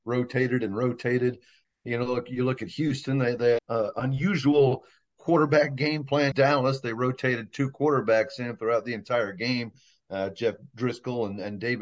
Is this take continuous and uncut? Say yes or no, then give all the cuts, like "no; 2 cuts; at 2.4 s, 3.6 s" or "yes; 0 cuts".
no; 2 cuts; at 3.6 s, 6.3 s